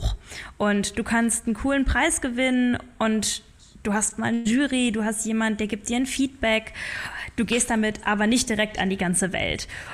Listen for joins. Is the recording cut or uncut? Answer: uncut